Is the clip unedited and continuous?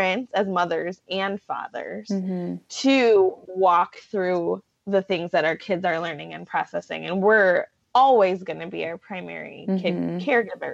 yes; 0 cuts

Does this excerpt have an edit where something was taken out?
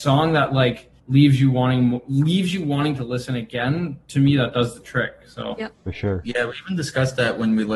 yes; 2 cuts; at 1.0 s, 5.7 s

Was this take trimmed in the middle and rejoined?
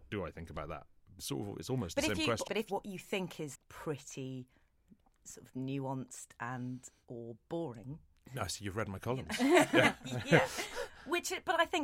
yes; 3 cuts; at 1.2 s, 2.5 s, 3.5 s

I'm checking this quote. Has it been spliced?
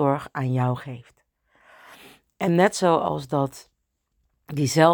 no; 0 cuts

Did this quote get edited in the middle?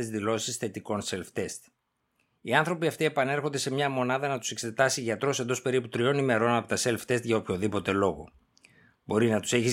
no; 0 cuts

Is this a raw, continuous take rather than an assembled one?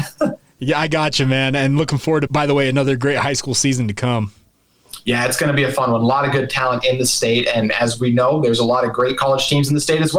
no; 1 cut; at 2.3 s

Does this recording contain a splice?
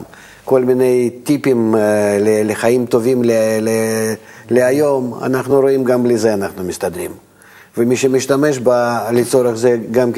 no; 0 cuts

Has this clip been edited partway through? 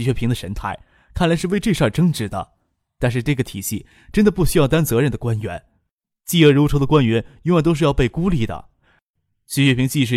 no; 0 cuts

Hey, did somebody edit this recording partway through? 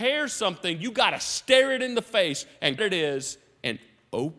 yes; 1 cut; at 2.8 s

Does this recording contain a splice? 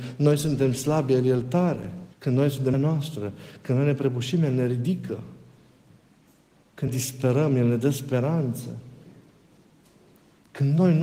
yes; 3 cuts; at 2.1 s, 2.7 s, 6.9 s

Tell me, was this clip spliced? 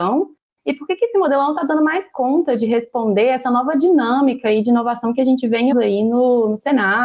yes; 1 cut; at 5.7 s

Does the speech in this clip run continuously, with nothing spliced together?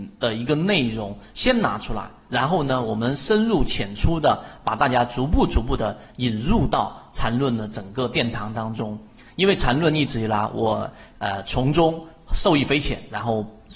yes; 0 cuts

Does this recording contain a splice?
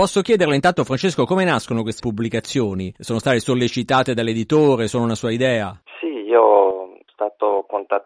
yes; 2 cuts; at 2.0 s, 7.1 s

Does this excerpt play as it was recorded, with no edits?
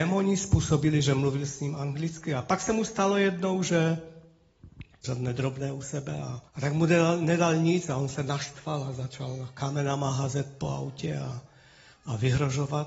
no; 2 cuts; at 5.0 s, 6.5 s

